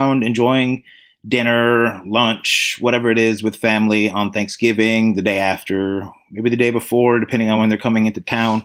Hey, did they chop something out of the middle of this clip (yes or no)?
no